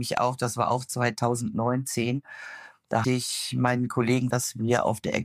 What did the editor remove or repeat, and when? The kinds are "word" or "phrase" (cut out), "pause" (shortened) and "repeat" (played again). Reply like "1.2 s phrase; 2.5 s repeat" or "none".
3.0 s word; 4.3 s word